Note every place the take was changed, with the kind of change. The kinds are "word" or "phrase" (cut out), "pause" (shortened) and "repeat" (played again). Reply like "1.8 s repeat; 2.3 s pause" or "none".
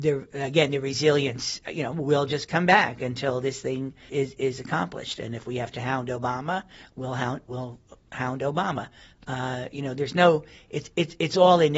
4.1 s word

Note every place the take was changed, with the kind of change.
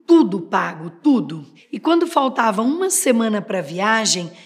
none

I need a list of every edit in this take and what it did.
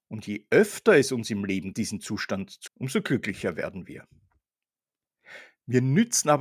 1.7 s word; 2.7 s word

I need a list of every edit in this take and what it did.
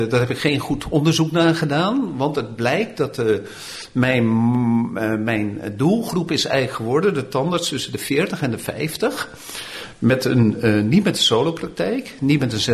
none

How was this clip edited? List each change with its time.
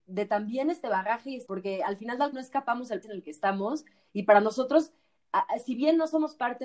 1.5 s word; 2.3 s word; 3.0 s word

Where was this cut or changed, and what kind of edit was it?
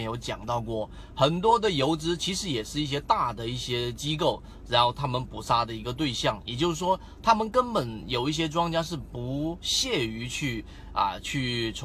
none

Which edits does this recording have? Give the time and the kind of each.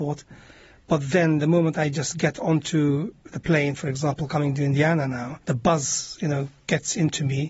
5.4 s pause

